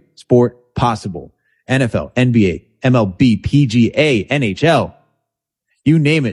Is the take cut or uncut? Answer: uncut